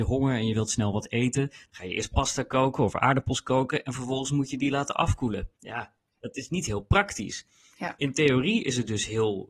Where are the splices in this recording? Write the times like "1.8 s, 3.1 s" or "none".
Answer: 5.6 s